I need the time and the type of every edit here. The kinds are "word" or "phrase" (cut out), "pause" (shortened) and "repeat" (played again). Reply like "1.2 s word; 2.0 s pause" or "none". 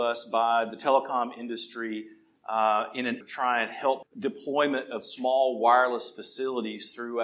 3.2 s word; 4.0 s word

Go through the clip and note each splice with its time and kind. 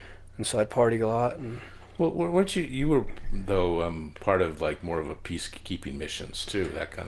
none

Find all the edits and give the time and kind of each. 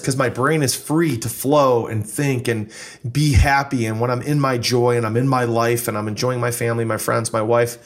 none

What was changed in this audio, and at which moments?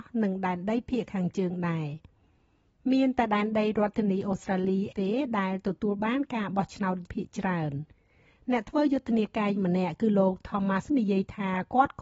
4.9 s word; 7.1 s word; 9.6 s word; 10.9 s word

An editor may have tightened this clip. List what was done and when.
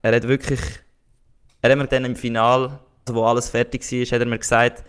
1.9 s word; 3.1 s word

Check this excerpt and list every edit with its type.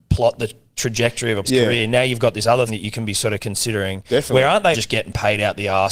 1.4 s word; 2.7 s word; 4.7 s word

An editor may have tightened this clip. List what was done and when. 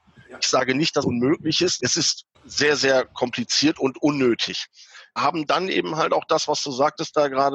1.0 s word; 1.8 s word; 2.3 s pause; 5.2 s word

